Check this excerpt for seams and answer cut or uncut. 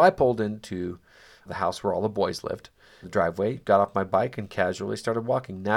cut